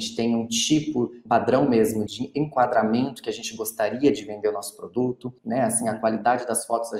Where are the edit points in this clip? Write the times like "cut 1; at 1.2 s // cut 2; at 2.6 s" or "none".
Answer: cut 1; at 1.3 s // cut 2; at 2.1 s // cut 3; at 5.4 s